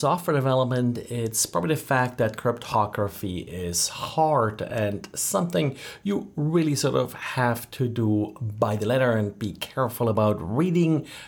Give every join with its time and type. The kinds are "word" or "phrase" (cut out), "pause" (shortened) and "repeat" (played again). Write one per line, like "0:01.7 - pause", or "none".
none